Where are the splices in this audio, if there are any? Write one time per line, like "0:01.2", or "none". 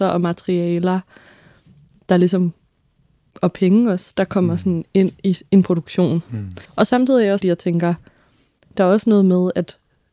0:05.2
0:06.7
0:07.4